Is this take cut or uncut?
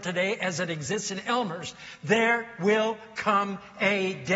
uncut